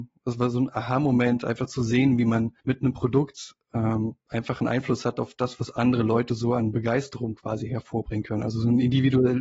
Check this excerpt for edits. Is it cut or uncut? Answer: cut